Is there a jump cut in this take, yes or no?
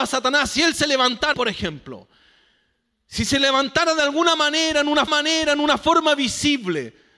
yes